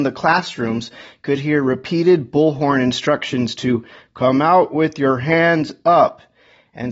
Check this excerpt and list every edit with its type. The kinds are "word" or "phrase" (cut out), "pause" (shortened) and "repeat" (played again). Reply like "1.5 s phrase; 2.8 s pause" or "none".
none